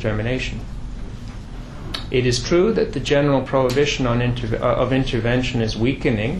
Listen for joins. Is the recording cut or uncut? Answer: uncut